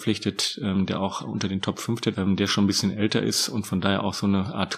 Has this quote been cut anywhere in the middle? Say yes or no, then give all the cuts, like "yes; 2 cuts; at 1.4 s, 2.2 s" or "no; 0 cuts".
yes; 1 cut; at 2.1 s